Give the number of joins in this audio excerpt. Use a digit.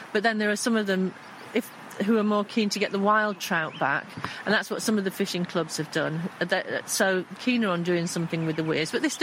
1